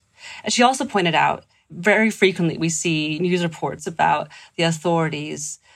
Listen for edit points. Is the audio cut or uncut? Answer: uncut